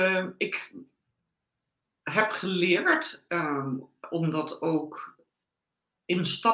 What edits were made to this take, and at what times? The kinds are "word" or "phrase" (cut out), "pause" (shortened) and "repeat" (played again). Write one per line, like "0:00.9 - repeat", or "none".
none